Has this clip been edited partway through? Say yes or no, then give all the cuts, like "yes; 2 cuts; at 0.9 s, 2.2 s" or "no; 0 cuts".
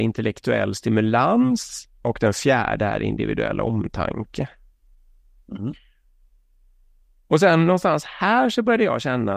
no; 0 cuts